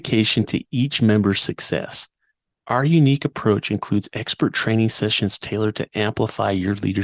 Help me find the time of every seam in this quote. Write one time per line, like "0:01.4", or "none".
none